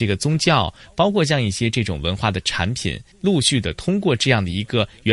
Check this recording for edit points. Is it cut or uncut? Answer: cut